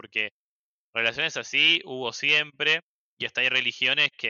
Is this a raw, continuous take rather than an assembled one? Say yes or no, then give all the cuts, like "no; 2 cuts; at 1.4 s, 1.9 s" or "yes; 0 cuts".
yes; 0 cuts